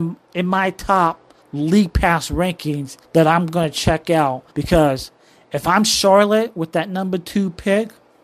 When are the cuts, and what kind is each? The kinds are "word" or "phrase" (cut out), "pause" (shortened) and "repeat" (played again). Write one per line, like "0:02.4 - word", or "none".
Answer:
0:01.4 - pause
0:03.0 - pause
0:04.5 - pause